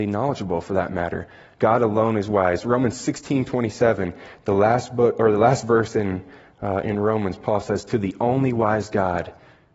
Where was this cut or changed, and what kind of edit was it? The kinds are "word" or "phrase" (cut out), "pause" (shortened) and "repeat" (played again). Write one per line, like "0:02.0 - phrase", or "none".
none